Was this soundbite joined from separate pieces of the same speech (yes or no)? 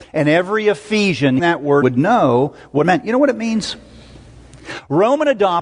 yes